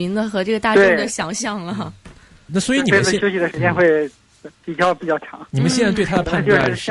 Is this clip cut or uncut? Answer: cut